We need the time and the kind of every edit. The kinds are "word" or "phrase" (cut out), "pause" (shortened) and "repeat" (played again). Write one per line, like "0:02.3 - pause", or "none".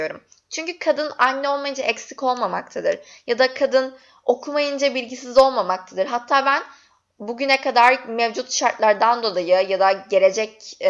none